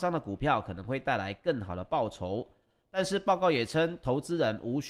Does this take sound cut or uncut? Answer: uncut